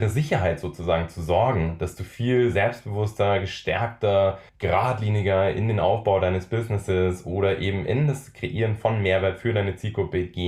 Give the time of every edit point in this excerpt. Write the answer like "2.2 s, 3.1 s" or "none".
4.5 s